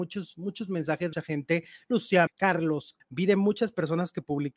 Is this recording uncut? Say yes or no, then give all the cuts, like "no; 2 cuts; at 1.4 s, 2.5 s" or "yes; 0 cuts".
no; 3 cuts; at 1.1 s, 2.3 s, 3.0 s